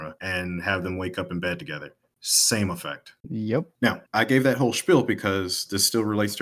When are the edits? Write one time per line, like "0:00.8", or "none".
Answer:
0:04.1